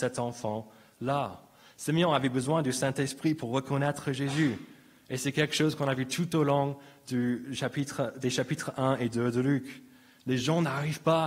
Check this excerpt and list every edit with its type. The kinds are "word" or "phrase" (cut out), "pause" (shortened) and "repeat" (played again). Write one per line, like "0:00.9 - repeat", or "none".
none